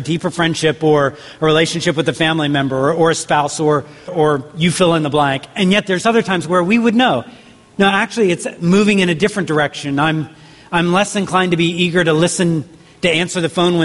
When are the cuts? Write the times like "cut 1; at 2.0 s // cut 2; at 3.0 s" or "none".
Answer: cut 1; at 4.1 s